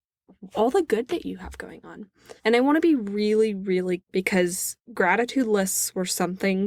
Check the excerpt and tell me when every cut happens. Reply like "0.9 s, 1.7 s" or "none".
2.4 s, 4.0 s